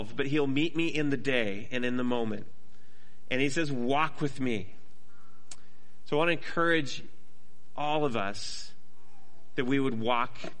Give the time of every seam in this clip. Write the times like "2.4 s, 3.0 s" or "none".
none